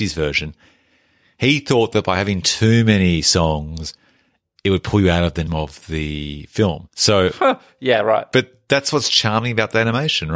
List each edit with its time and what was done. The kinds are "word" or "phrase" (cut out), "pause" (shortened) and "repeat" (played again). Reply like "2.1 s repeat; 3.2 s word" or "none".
5.5 s word